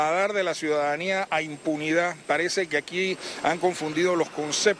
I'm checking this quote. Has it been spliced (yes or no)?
no